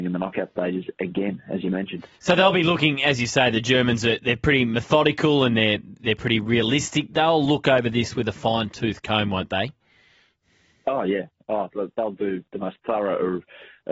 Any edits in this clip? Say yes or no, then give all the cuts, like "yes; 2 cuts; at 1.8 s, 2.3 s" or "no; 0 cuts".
yes; 1 cut; at 12.5 s